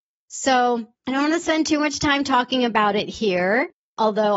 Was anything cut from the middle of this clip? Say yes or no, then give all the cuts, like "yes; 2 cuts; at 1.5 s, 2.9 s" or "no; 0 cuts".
yes; 1 cut; at 0.9 s